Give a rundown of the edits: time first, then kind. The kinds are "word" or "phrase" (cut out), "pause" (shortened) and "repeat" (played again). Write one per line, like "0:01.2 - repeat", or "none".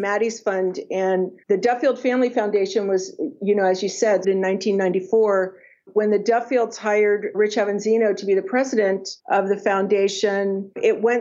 0:04.2 - word